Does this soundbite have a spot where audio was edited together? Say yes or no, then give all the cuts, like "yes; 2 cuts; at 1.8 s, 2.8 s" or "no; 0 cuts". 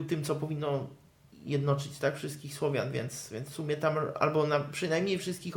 no; 0 cuts